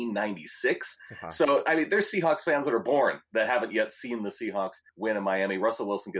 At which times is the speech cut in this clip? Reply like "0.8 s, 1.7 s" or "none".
4.9 s